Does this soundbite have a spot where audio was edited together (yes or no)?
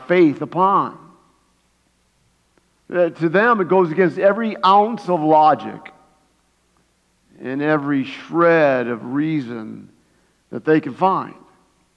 no